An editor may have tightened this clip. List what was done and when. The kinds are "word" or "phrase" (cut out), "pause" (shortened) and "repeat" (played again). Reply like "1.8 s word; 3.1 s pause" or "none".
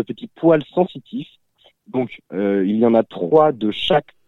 none